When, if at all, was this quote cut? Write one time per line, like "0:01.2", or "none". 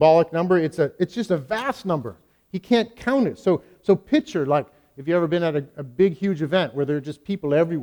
none